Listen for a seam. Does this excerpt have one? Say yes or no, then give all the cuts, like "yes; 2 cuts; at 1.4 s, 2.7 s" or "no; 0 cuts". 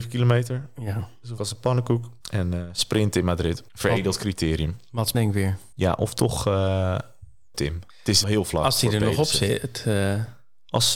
yes; 8 cuts; at 1.4 s, 2.2 s, 3.7 s, 5.1 s, 5.7 s, 7.5 s, 7.9 s, 8.2 s